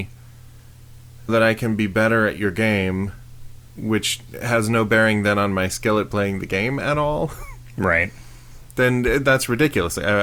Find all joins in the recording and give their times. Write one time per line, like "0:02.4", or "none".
0:01.3
0:03.7